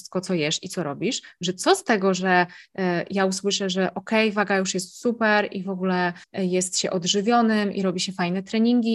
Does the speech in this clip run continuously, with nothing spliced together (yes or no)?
no